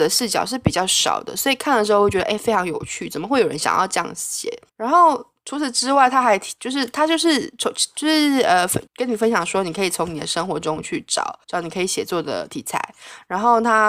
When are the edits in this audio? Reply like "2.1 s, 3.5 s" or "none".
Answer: 4.7 s, 8.9 s, 11.4 s